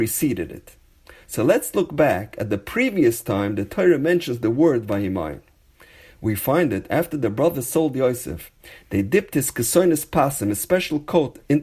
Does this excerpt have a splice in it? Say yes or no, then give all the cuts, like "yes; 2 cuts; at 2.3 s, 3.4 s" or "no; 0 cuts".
no; 0 cuts